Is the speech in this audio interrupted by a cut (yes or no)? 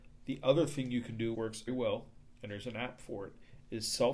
yes